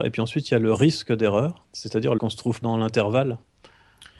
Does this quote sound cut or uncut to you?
cut